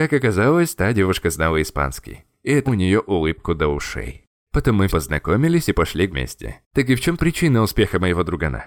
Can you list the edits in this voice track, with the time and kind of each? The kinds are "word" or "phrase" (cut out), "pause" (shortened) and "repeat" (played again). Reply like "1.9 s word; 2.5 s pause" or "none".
2.7 s phrase; 4.9 s word; 6.1 s word; 6.6 s pause; 7.2 s word